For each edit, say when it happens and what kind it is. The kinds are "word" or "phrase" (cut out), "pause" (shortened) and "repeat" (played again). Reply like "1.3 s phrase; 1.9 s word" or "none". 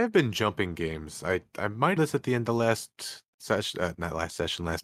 2.0 s phrase